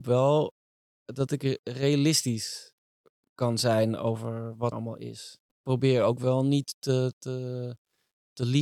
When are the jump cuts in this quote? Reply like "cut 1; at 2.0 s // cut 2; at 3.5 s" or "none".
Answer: cut 1; at 4.7 s